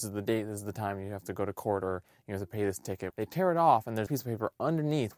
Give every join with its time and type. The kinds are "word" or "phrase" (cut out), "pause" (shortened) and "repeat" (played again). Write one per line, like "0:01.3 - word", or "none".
0:03.1 - word
0:04.1 - word